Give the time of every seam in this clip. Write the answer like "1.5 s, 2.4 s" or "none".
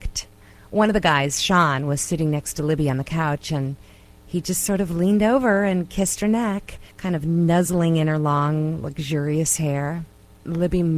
6.9 s